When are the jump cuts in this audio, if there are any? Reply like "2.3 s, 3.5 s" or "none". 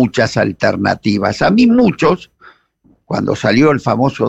none